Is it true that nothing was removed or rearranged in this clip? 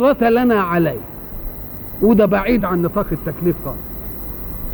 yes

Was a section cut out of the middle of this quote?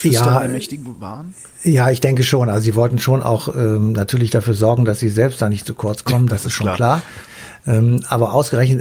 yes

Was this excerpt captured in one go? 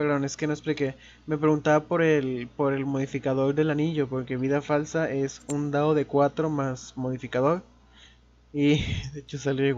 yes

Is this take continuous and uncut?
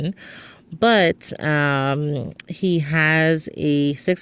yes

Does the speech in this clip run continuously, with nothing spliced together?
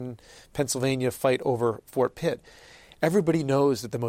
yes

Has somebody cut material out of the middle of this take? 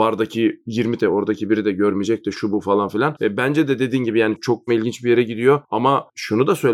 yes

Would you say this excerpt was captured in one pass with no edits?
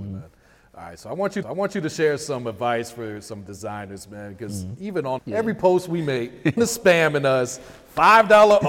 no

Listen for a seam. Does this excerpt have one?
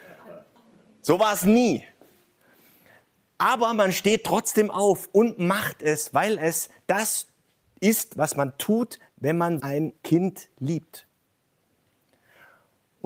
yes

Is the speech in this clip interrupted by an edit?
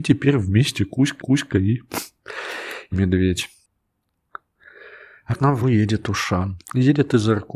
yes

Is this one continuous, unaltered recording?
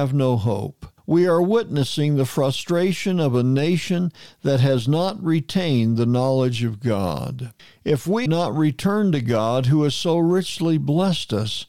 no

